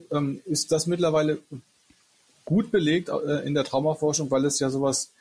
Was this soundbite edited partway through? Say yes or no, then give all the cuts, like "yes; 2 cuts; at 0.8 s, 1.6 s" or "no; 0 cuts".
no; 0 cuts